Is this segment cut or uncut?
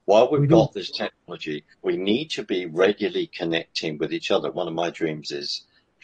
cut